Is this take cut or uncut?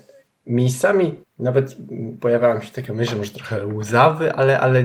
cut